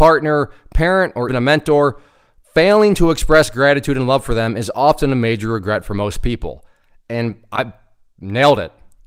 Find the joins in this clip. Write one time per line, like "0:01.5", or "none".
0:01.3